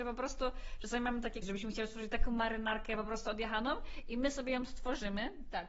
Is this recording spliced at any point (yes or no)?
yes